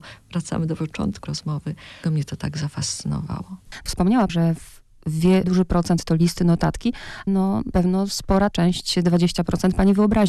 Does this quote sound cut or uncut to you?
cut